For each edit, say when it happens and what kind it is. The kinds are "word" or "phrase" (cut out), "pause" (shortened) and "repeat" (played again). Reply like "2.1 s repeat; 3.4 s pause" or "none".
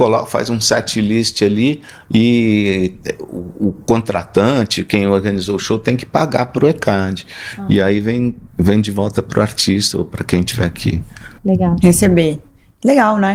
8.5 s pause; 11.4 s pause